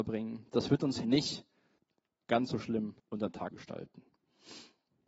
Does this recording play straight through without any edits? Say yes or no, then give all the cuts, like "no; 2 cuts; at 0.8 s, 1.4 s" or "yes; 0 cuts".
no; 4 cuts; at 1.0 s, 1.8 s, 3.0 s, 3.5 s